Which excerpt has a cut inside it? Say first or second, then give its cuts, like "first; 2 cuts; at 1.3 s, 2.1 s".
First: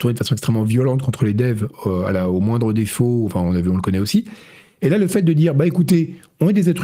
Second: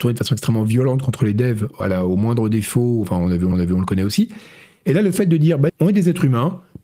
second; 3 cuts; at 1.8 s, 3.5 s, 5.7 s